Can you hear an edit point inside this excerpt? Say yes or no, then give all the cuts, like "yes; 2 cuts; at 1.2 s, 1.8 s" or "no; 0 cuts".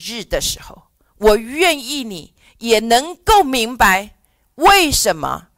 no; 0 cuts